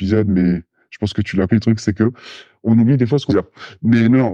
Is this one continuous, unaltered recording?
no; 2 cuts; at 1.5 s, 3.3 s

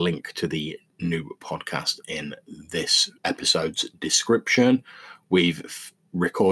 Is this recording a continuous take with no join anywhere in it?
no; 1 cut; at 3.2 s

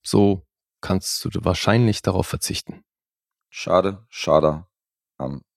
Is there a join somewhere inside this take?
no; 0 cuts

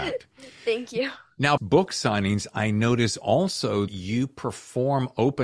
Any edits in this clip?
yes; 2 cuts; at 1.6 s, 3.9 s

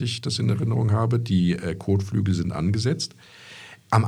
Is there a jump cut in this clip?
no; 0 cuts

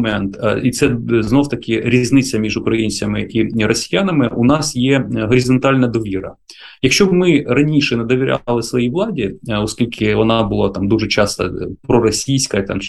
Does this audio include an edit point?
no; 0 cuts

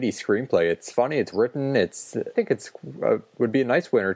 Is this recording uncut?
no; 2 cuts; at 1.3 s, 2.3 s

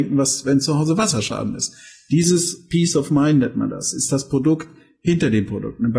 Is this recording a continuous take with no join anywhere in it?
yes; 0 cuts

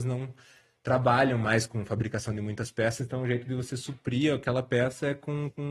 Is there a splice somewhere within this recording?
no; 0 cuts

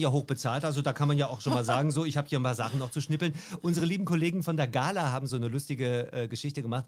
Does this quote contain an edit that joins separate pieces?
no; 0 cuts

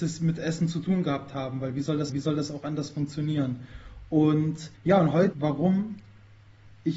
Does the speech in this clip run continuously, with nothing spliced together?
no; 3 cuts; at 2.1 s, 4.7 s, 5.3 s

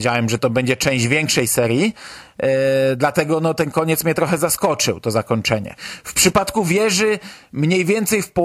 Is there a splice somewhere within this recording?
no; 0 cuts

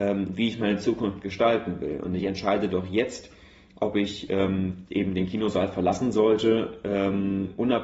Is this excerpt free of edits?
yes; 0 cuts

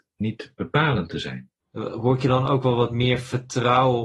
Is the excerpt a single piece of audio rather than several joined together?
no; 1 cut; at 1.6 s

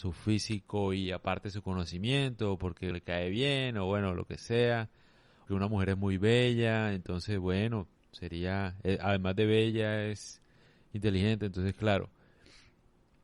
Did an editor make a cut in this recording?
yes; 2 cuts; at 2.9 s, 5.5 s

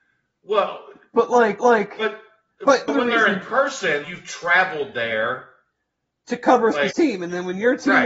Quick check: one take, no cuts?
no; 4 cuts; at 1.6 s, 2.9 s, 4.0 s, 6.9 s

